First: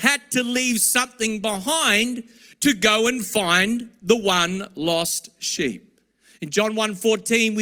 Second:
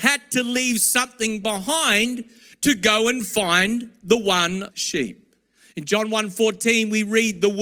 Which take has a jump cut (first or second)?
second